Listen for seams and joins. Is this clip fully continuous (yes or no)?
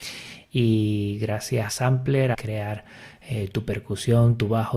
no